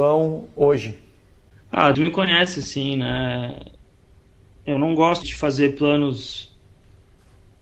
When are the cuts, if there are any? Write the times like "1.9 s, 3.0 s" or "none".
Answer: 1.9 s, 5.2 s